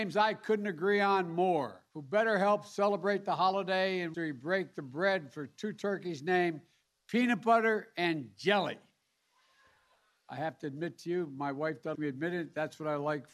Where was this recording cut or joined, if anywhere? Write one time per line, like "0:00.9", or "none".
0:01.9
0:04.1
0:11.9

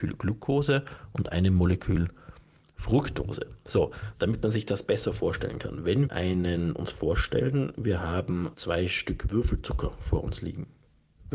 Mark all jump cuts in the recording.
0:06.1

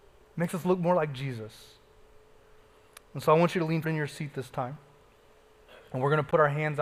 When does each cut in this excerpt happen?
0:03.8

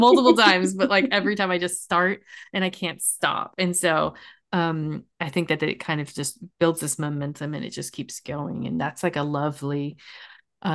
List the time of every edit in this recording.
none

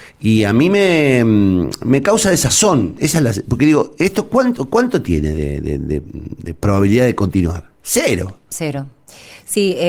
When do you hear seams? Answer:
none

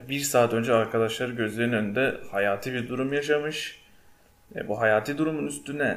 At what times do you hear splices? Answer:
none

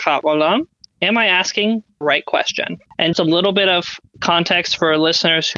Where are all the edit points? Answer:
0:03.1

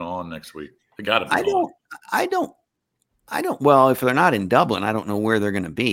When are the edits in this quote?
none

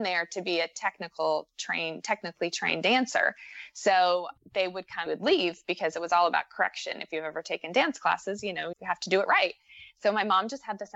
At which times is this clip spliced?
0:05.1
0:08.7

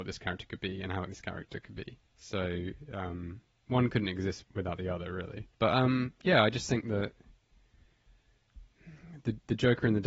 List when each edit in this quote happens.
0:01.1
0:02.0
0:04.4
0:05.5

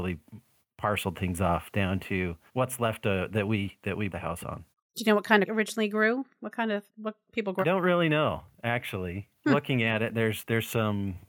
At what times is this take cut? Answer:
0:02.5
0:04.1
0:04.7
0:05.4
0:06.9
0:07.6
0:09.3

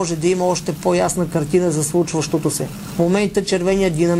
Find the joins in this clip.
none

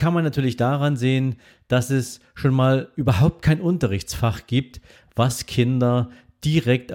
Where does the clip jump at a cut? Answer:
none

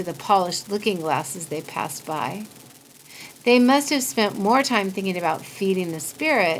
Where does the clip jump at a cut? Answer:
none

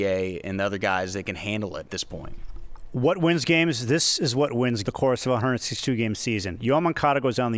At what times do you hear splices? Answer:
0:01.9
0:04.8

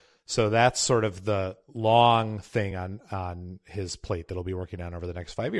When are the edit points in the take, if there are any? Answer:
none

